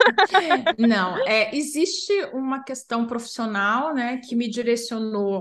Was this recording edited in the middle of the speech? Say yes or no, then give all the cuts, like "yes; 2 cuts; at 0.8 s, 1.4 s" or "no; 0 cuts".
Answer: no; 0 cuts